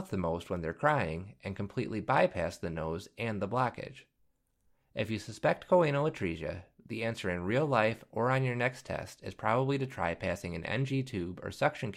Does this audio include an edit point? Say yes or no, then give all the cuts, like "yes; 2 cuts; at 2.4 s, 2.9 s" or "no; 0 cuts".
no; 0 cuts